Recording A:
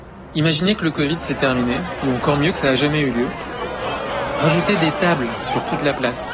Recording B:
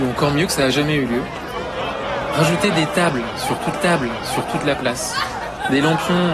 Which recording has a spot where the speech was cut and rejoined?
B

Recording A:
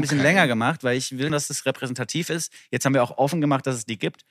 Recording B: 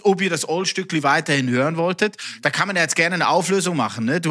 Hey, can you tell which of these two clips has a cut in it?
A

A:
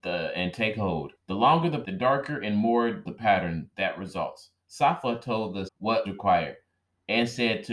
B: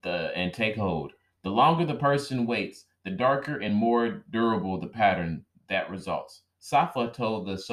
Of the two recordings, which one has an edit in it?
A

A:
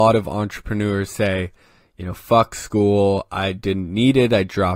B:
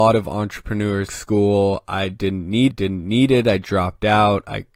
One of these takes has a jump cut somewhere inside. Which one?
B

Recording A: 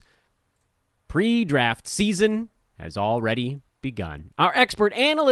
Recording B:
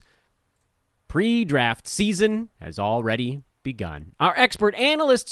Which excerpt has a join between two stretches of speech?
B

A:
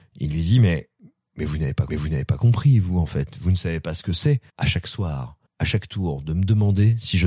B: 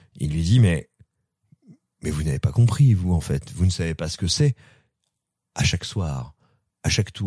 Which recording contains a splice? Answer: A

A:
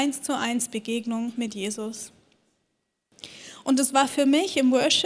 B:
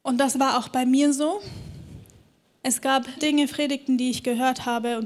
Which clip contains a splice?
B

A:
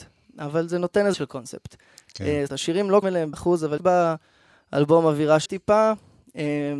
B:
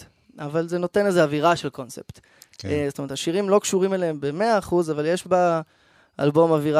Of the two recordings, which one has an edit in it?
A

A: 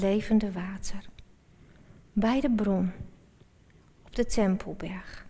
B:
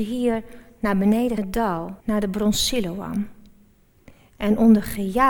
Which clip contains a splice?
B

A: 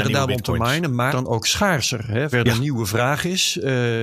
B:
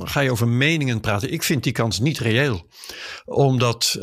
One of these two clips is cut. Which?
A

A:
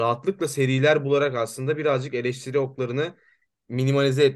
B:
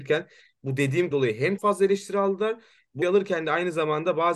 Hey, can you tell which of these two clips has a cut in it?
B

